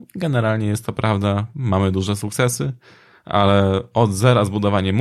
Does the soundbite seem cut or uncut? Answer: uncut